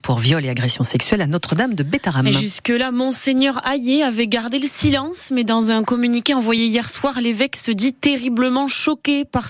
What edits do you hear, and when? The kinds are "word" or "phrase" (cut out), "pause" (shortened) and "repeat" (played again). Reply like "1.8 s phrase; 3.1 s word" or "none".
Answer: none